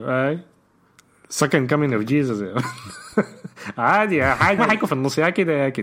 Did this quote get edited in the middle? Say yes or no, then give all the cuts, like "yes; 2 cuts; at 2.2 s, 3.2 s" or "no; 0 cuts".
yes; 2 cuts; at 4.6 s, 4.9 s